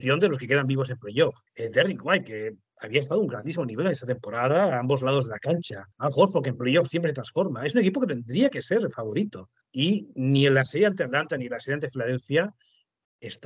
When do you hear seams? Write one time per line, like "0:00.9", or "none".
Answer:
0:01.5
0:05.9
0:09.6